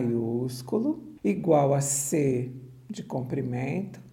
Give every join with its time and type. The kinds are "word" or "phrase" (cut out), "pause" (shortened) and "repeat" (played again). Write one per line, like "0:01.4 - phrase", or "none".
0:01.2 - pause